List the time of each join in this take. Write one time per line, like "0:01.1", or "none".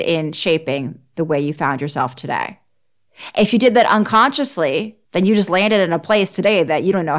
0:05.1